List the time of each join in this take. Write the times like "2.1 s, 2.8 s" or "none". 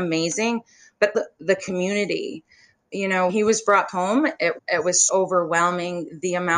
1.1 s, 2.8 s, 3.3 s, 3.9 s, 4.6 s, 5.1 s